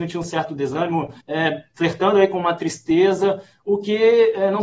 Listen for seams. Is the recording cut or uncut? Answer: cut